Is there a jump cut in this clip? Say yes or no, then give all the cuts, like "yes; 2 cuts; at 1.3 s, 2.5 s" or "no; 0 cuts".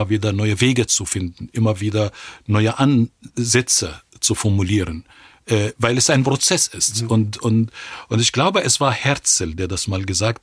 no; 0 cuts